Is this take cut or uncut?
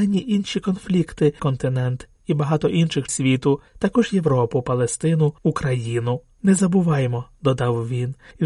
cut